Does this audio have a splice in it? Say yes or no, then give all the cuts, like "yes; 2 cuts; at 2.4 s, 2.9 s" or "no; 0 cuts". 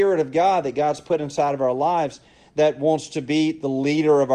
no; 0 cuts